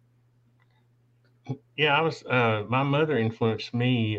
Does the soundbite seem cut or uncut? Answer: uncut